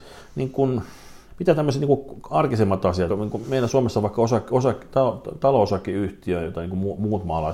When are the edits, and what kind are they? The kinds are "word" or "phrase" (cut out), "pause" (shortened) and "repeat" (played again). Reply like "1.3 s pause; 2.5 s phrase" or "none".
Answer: 1.3 s pause; 3.1 s phrase; 3.4 s word